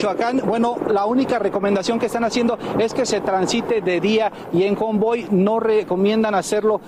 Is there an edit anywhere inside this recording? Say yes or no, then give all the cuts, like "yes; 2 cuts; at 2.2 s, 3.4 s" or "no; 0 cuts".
no; 0 cuts